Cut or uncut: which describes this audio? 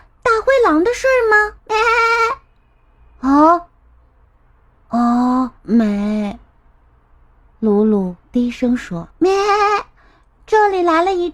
cut